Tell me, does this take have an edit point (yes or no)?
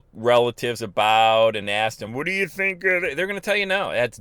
no